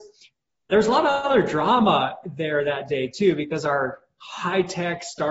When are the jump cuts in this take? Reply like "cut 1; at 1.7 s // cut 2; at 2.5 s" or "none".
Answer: none